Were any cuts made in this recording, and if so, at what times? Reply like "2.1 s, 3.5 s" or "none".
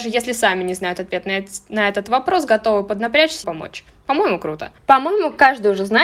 3.4 s, 4.8 s